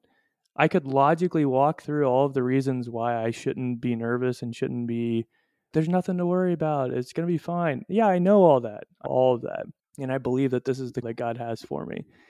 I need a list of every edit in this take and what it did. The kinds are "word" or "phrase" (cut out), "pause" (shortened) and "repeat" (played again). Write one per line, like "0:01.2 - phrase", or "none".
0:05.7 - word
0:09.1 - word
0:09.8 - pause
0:11.0 - word